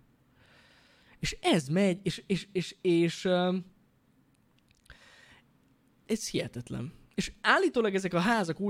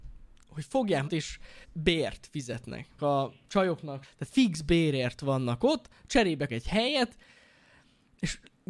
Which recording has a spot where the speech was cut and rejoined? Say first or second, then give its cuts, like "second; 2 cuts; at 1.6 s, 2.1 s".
second; 5 cuts; at 1.1 s, 1.6 s, 3.0 s, 4.0 s, 6.5 s